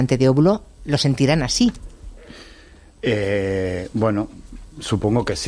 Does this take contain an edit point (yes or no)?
no